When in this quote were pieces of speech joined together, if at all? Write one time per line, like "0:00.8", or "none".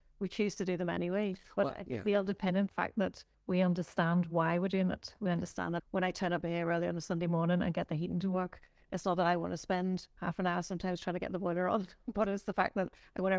0:02.7
0:03.3
0:05.8